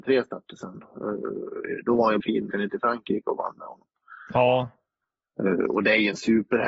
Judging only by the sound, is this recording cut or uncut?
cut